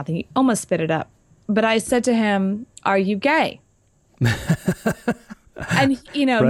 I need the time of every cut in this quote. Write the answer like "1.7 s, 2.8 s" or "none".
none